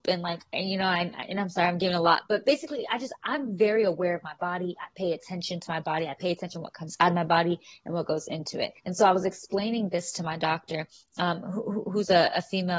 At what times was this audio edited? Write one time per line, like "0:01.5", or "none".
0:08.8